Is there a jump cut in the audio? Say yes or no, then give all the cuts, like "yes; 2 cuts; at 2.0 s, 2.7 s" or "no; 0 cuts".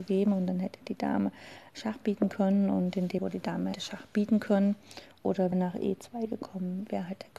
yes; 3 cuts; at 3.2 s, 3.7 s, 5.5 s